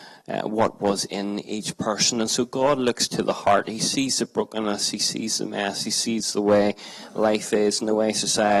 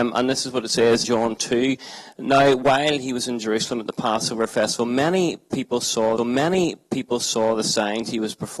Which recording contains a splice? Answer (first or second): second